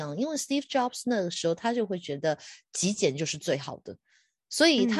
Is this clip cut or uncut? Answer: uncut